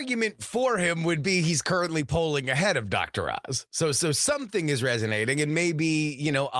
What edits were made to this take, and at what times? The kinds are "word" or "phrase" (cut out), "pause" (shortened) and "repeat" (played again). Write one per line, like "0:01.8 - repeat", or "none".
none